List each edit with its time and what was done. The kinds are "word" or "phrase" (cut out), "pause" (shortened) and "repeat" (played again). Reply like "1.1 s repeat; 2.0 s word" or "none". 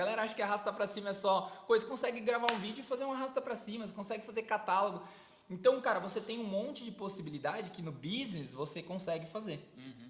none